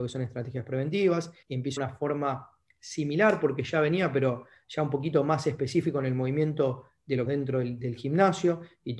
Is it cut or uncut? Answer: cut